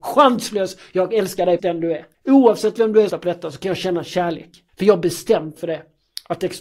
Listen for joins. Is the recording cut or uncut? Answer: cut